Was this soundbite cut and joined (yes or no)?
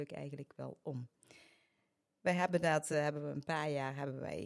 no